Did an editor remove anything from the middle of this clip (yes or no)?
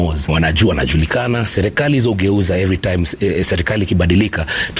no